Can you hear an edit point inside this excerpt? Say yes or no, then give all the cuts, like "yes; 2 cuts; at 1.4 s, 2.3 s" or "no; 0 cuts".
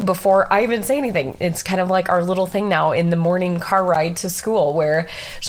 no; 0 cuts